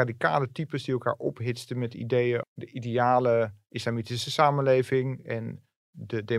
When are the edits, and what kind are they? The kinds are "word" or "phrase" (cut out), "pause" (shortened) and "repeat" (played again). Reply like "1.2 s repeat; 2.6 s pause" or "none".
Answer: 2.4 s word

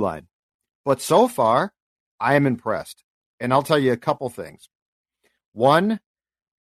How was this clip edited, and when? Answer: none

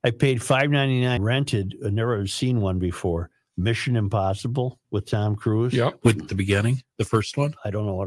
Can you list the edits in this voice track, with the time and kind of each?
1.2 s word; 4.8 s pause; 6.3 s phrase

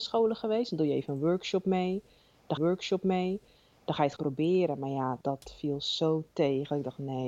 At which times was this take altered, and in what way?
2.6 s repeat; 4.2 s word; 5.2 s pause

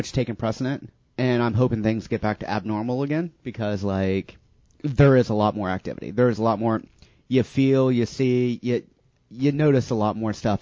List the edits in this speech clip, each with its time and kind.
none

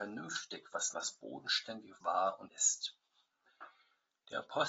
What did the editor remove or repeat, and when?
0.9 s word; 2.0 s word; 2.5 s word

